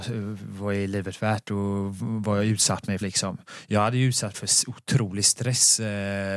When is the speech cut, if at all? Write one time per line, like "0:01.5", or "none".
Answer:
0:03.0
0:04.3